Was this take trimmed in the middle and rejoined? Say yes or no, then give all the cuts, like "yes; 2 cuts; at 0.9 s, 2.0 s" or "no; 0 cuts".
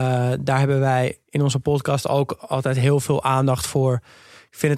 no; 0 cuts